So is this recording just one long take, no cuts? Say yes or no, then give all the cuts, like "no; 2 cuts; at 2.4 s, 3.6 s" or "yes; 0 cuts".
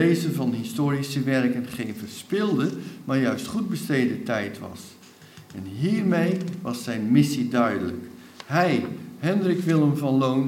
yes; 0 cuts